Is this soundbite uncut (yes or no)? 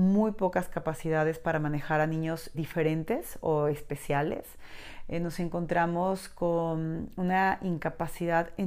no